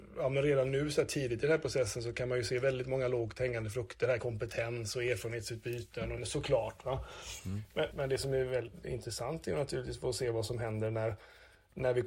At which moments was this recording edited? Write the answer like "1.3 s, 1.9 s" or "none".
4.2 s, 6.2 s, 7.9 s